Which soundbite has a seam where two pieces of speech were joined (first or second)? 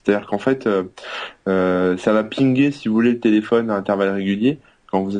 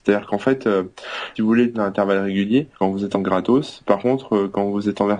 second